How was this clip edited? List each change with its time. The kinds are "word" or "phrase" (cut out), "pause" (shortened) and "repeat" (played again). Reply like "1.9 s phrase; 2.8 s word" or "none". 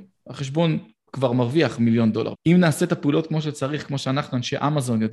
1.1 s word; 2.3 s word